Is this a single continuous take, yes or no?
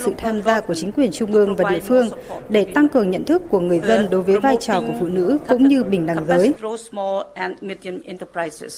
yes